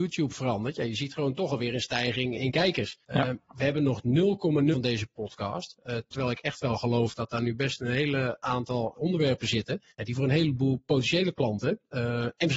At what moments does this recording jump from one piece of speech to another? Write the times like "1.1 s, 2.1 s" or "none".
2.3 s, 3.0 s, 4.7 s, 8.9 s, 9.9 s